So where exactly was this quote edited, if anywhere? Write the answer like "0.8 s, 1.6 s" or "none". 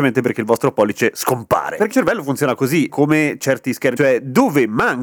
1.9 s, 2.9 s, 4.0 s